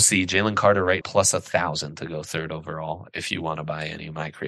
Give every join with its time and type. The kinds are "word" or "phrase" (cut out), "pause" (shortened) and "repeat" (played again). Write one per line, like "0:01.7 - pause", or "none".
0:01.0 - word